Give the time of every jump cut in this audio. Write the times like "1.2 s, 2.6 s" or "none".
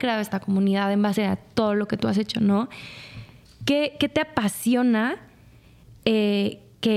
none